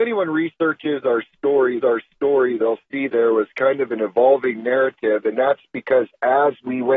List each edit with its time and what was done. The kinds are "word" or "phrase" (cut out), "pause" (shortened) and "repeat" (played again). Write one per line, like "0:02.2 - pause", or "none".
0:01.8 - repeat
0:03.1 - word